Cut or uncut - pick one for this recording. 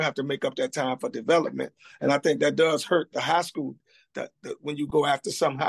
uncut